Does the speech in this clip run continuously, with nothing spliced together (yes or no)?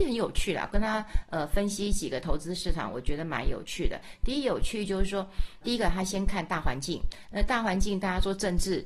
no